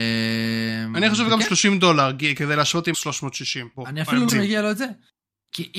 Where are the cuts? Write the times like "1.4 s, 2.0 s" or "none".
2.9 s, 3.7 s, 4.3 s